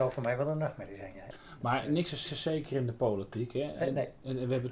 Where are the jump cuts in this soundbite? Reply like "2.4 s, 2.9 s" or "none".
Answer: 2.3 s